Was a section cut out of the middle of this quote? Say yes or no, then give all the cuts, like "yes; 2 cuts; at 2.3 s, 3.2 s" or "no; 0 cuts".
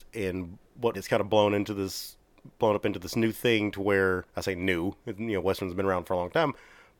yes; 2 cuts; at 0.9 s, 4.3 s